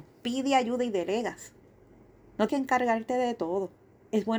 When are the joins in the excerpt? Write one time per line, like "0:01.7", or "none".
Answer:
0:02.5